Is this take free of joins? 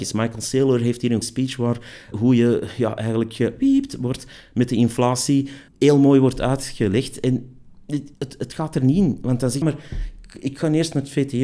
no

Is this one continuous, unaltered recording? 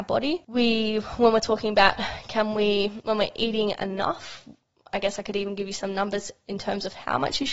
yes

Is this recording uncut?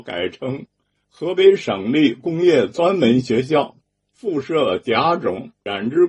yes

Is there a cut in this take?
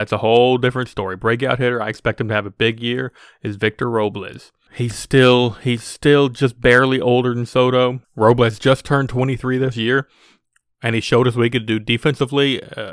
yes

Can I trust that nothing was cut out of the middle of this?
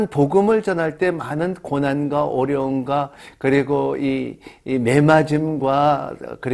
yes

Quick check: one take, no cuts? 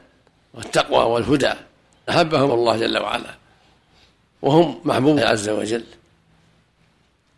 no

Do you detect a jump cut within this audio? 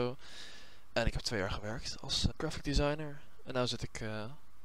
yes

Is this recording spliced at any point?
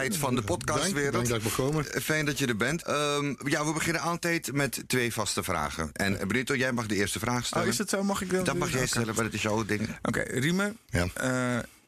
no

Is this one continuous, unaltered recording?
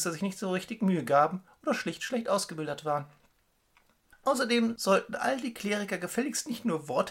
yes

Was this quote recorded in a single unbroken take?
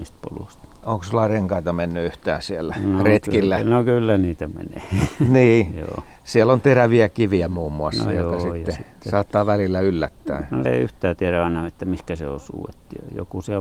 no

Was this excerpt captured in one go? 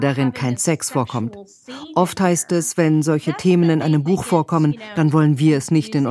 yes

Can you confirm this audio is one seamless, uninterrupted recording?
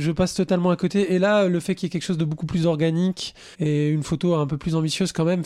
no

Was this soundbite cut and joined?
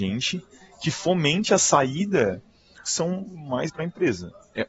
yes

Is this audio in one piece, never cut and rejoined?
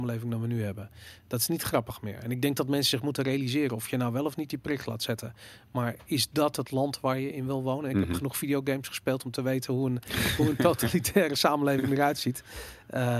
yes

